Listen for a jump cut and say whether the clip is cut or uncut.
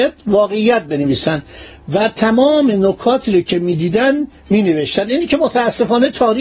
uncut